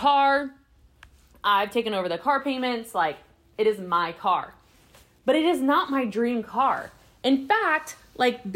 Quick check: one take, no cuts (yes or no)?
yes